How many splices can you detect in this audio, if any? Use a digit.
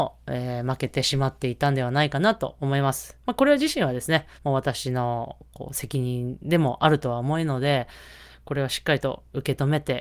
1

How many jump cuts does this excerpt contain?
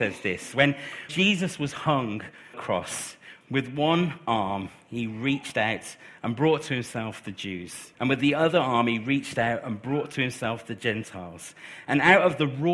4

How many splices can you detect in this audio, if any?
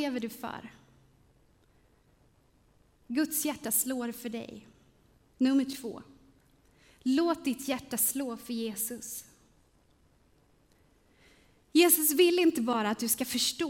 0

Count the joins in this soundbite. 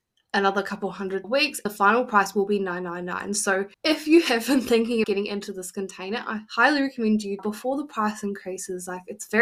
5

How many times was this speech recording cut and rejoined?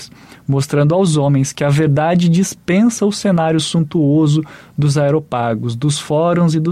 0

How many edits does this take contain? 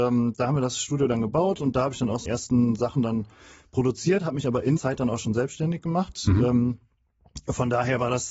2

